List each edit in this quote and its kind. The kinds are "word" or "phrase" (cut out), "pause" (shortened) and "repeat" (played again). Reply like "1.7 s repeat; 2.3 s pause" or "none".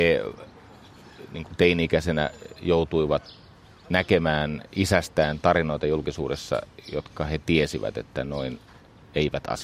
none